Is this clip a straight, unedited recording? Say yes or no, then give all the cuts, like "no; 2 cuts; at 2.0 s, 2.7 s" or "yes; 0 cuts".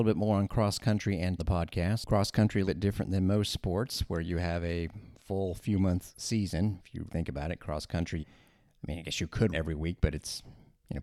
no; 5 cuts; at 1.4 s, 2.6 s, 7.1 s, 8.2 s, 9.5 s